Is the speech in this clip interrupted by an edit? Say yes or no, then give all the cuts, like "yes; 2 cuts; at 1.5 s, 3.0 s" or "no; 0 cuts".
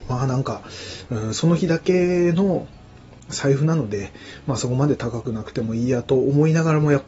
no; 0 cuts